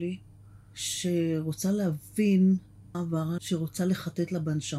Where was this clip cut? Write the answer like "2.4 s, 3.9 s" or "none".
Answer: 2.9 s, 3.4 s